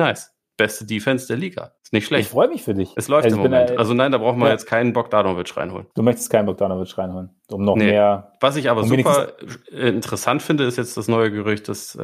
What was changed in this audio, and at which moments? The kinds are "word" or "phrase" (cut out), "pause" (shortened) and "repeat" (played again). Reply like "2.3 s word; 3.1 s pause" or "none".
1.8 s pause; 5.9 s pause